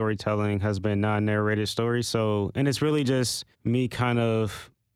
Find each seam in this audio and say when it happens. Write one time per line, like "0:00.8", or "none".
0:03.5